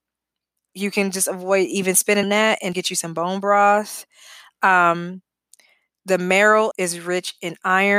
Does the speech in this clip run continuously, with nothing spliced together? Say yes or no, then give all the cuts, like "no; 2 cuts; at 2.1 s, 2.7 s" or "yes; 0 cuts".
no; 3 cuts; at 2.2 s, 2.7 s, 6.7 s